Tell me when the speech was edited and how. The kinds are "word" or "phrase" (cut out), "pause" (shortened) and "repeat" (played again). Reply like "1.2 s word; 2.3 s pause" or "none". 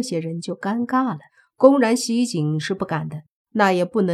1.3 s pause